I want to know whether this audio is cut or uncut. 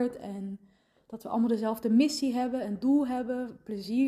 uncut